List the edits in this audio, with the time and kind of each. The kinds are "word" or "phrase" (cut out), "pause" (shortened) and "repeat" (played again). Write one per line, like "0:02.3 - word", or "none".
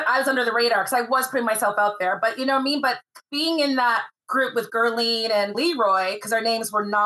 0:04.2 - pause
0:05.5 - phrase

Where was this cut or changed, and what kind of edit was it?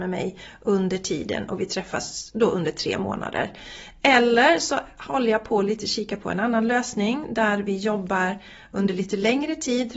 none

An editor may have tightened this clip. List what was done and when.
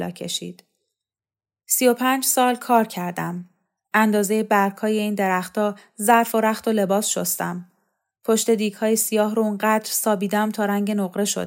none

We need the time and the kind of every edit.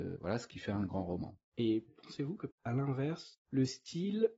0:01.4 - pause
0:02.5 - word

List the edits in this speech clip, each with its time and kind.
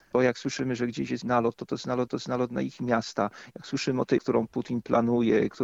0:01.2 - word
0:02.1 - repeat
0:04.2 - word

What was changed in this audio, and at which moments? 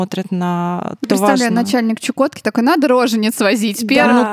0:01.0 - word

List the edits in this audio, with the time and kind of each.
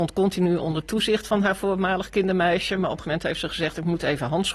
0:03.0 - word

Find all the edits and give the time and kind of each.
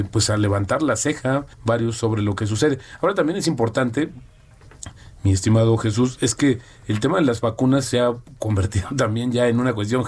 0:01.5 - pause

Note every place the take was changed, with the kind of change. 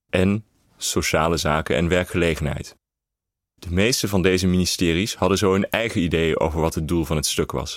none

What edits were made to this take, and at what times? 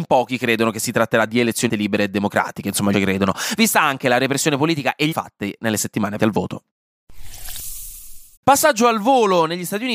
0:01.7 - word
0:02.9 - phrase
0:05.1 - word
0:06.2 - word
0:08.4 - pause

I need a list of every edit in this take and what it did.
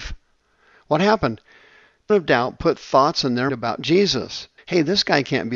0:02.1 - word
0:03.5 - word
0:04.6 - pause

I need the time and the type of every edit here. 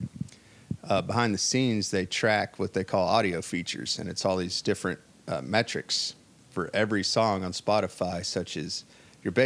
none

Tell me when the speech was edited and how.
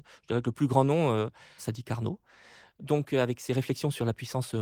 0:01.6 - phrase

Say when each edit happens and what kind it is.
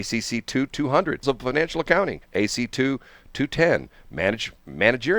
0:01.2 - word
0:02.2 - pause

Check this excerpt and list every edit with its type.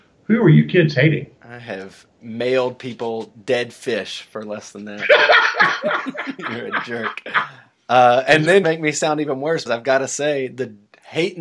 0:01.4 - pause
0:02.1 - pause
0:08.6 - phrase
0:09.7 - word

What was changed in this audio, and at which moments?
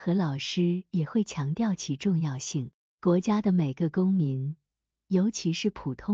0:02.9 - pause

